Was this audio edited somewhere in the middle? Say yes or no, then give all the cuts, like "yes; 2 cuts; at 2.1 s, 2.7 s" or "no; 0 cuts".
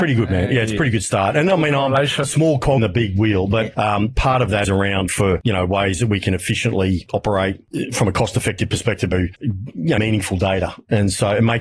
yes; 6 cuts; at 2.2 s, 2.8 s, 4.6 s, 5.1 s, 9.1 s, 10.0 s